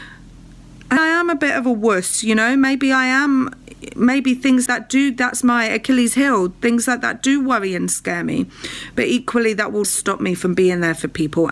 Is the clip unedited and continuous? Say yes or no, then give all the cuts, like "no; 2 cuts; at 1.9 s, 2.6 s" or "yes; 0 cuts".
no; 3 cuts; at 1.0 s, 4.7 s, 9.8 s